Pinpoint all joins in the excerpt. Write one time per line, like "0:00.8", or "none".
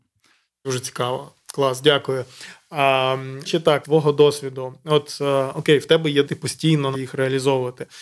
0:03.5
0:03.8
0:06.2
0:06.9

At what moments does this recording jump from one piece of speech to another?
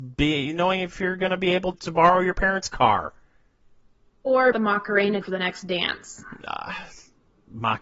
0:01.7
0:04.5
0:05.2

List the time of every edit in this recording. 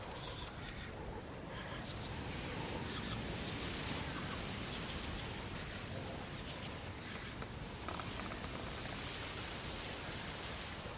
none

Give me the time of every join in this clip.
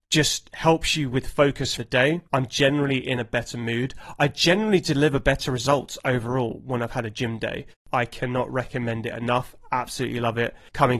0:01.8
0:02.3

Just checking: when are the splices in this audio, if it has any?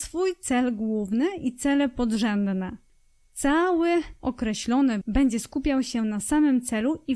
0:05.0

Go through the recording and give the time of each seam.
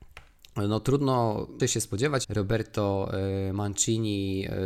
0:01.6
0:02.2

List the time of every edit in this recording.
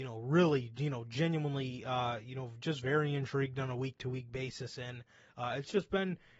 none

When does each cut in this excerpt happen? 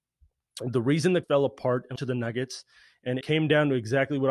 0:01.2
0:02.0
0:03.2

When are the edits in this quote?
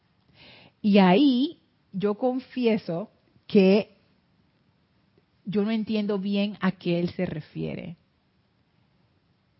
none

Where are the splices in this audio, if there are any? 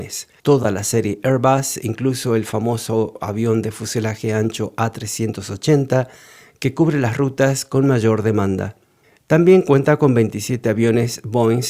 none

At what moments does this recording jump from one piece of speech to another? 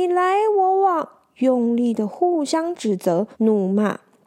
0:03.3

